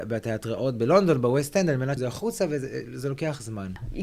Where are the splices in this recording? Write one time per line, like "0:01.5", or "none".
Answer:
0:02.0